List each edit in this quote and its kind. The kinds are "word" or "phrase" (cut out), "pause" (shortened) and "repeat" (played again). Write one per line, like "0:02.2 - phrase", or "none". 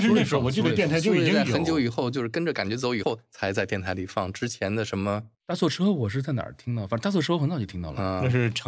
0:05.3 - pause